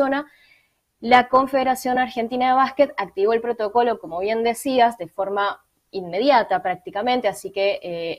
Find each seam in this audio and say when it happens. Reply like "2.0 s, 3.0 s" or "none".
none